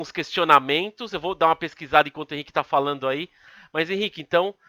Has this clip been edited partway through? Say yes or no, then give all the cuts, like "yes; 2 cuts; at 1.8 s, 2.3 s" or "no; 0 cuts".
no; 0 cuts